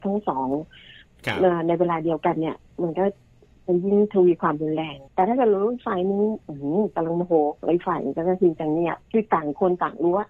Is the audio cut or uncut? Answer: cut